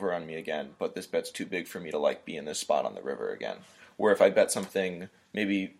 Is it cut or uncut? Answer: uncut